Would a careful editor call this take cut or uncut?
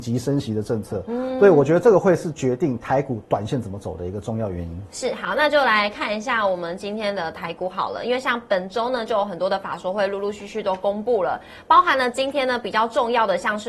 uncut